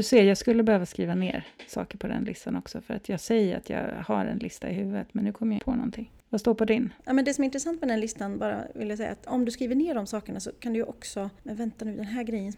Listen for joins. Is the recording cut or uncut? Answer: cut